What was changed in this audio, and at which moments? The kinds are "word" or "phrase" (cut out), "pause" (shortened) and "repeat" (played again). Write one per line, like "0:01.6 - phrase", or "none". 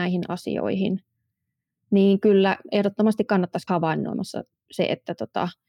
0:03.7 - word